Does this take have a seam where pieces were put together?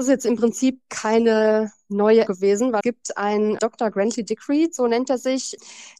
yes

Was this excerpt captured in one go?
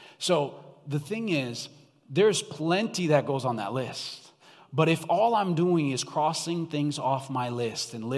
yes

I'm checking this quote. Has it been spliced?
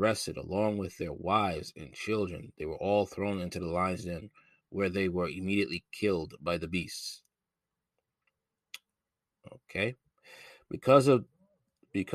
yes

